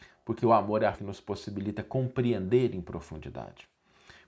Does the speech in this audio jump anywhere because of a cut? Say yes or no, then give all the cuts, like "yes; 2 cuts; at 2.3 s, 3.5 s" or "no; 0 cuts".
yes; 1 cut; at 0.9 s